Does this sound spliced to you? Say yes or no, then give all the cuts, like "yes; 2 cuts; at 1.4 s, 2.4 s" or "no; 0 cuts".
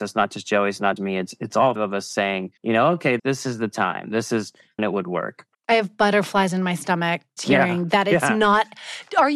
yes; 7 cuts; at 1.0 s, 1.8 s, 2.6 s, 3.2 s, 4.8 s, 5.5 s, 7.4 s